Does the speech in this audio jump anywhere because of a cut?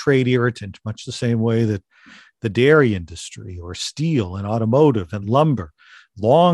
no; 0 cuts

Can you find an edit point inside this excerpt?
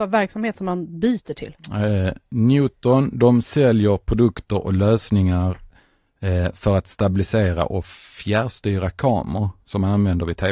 no; 0 cuts

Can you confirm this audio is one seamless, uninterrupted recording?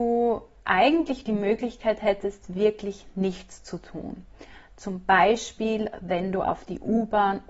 yes; 0 cuts

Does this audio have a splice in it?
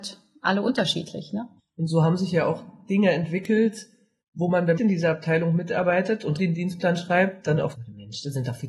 yes; 5 cuts; at 1.6 s, 4.2 s, 4.8 s, 6.4 s, 7.7 s

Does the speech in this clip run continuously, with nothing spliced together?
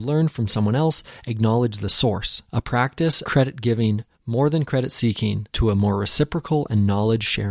no; 4 cuts; at 2.5 s, 3.2 s, 4.1 s, 5.5 s

